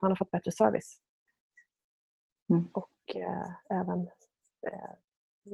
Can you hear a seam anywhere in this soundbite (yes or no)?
no